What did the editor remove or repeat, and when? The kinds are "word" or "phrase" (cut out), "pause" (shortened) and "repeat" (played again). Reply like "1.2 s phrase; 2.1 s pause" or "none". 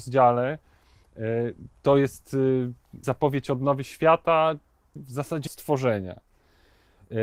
3.0 s word; 5.0 s word; 5.5 s word

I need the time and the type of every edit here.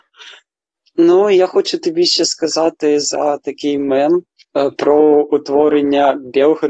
none

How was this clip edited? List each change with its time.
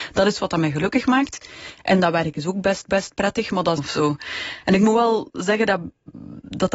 2.9 s repeat; 3.8 s phrase

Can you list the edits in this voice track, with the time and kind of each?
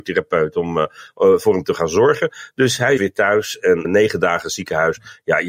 3.0 s word; 3.8 s word

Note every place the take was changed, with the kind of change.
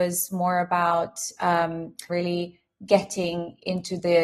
2.1 s phrase

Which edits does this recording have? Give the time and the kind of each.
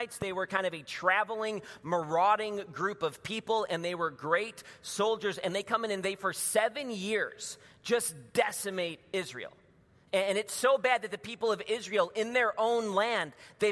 none

